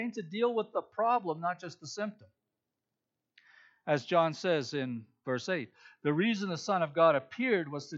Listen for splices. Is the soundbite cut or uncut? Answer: uncut